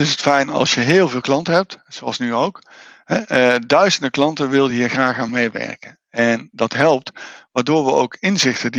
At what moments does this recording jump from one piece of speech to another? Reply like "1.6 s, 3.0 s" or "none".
none